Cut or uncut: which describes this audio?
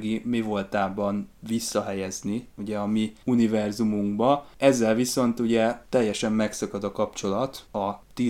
uncut